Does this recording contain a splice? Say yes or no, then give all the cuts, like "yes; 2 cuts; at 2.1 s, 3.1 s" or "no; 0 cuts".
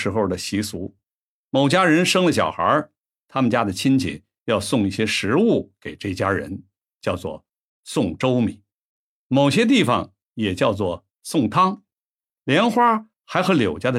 no; 0 cuts